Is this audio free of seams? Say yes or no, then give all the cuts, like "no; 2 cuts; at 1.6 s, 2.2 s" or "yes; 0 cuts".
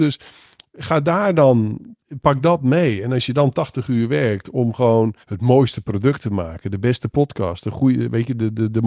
no; 1 cut; at 5.2 s